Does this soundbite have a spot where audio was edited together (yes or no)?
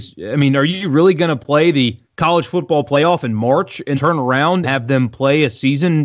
yes